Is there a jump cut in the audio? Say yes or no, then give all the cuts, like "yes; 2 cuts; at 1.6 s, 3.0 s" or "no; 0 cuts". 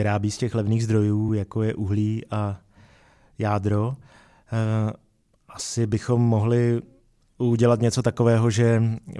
no; 0 cuts